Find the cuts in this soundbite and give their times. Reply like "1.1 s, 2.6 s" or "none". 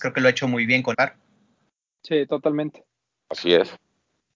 0.9 s